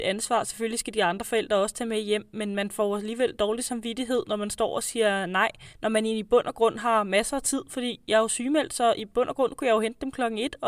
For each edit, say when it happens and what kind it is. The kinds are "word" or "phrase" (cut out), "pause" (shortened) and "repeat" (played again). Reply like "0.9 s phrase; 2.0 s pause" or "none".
5.7 s pause